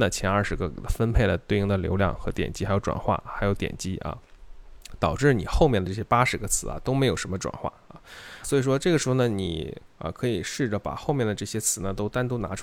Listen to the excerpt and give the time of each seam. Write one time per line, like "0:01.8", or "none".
0:08.4